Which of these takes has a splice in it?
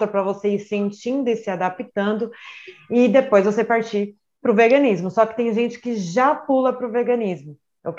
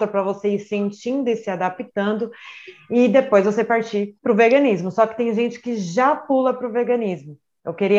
second; 1 cut; at 4.2 s

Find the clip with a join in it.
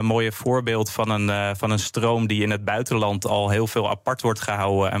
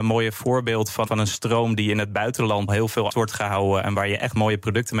second; 3 cuts; at 1.1 s, 2.7 s, 3.1 s

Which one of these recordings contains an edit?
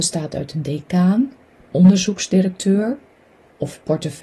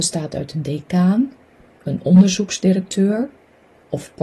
first; 1 cut; at 1.7 s

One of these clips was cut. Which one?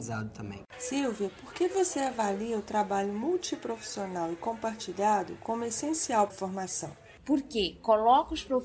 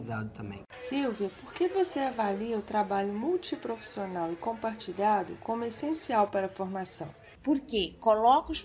first; 1 cut; at 6.3 s

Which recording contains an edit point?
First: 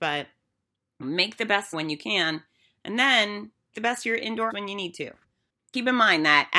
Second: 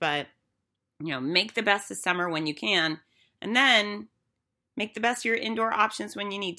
first; 4 cuts; at 1.0 s, 1.7 s, 3.7 s, 4.5 s

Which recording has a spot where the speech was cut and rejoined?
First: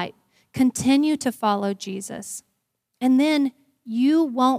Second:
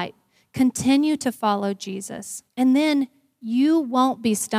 second; 1 cut; at 2.5 s

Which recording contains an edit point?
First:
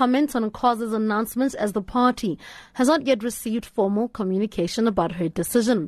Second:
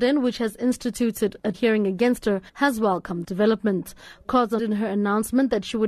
second; 4 cuts; at 1.5 s, 2.5 s, 3.2 s, 4.6 s

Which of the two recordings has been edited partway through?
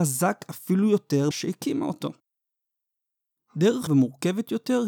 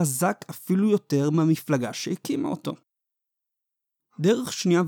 first; 2 cuts; at 1.3 s, 3.9 s

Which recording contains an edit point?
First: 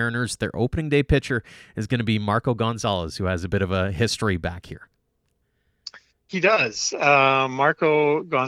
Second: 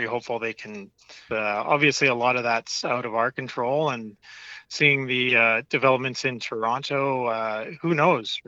second; 1 cut; at 1.3 s

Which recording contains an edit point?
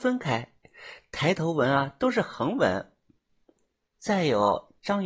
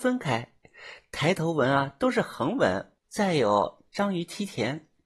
second; 1 cut; at 3.0 s

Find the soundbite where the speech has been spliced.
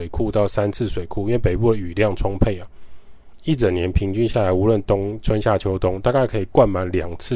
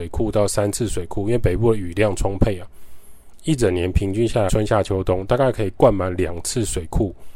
second; 1 cut; at 4.5 s

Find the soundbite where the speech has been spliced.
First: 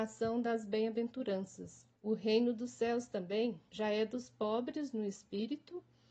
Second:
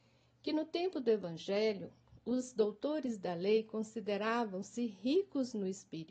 first; 2 cuts; at 1.9 s, 3.7 s

